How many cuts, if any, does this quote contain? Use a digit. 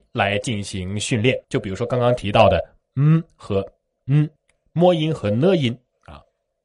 2